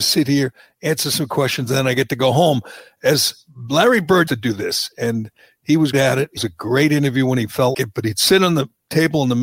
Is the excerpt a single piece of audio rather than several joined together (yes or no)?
no